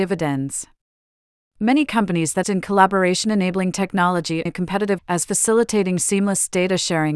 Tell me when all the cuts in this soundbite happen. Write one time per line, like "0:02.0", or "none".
0:02.4
0:04.5
0:05.0